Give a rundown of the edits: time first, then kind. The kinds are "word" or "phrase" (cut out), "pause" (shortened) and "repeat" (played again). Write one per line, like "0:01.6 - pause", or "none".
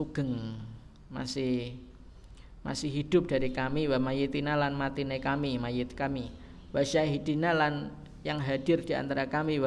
none